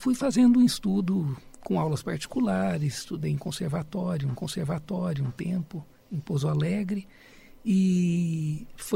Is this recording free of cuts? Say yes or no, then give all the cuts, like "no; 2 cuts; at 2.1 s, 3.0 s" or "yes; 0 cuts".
no; 2 cuts; at 4.4 s, 7.3 s